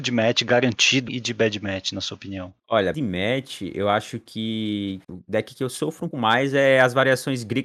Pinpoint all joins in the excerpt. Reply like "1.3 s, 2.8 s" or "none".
1.1 s, 2.9 s, 5.0 s, 6.1 s